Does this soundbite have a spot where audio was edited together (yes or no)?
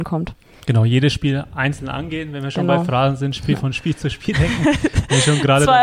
no